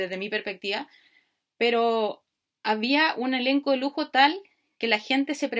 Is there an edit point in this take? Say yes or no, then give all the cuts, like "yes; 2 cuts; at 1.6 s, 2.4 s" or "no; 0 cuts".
no; 0 cuts